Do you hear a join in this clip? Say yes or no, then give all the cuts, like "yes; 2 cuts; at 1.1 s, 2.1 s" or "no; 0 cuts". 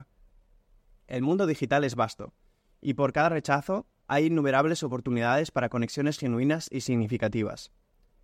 no; 0 cuts